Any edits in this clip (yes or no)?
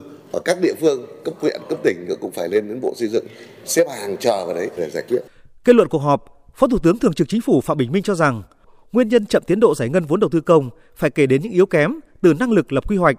yes